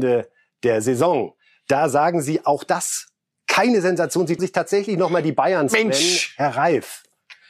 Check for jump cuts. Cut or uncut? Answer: cut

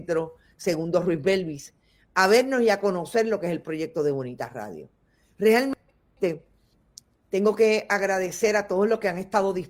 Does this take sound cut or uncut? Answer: uncut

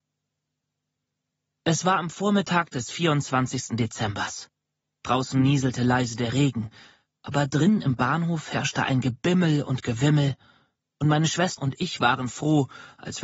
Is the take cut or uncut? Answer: cut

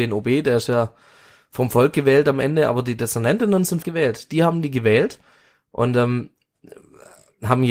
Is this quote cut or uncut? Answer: cut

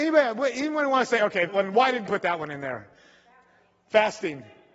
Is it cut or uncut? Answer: cut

